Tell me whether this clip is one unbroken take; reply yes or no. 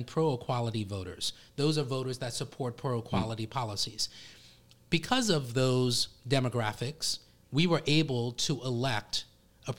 yes